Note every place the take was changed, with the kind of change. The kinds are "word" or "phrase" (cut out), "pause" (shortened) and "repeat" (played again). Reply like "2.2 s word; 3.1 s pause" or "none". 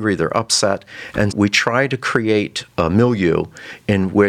1.3 s word